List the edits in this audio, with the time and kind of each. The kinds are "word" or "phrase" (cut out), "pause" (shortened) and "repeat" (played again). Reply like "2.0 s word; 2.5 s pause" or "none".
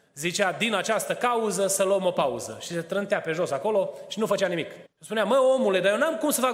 4.8 s pause